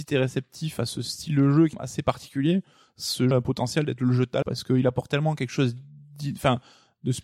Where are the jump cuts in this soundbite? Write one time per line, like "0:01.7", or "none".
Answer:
0:01.7
0:03.3
0:04.4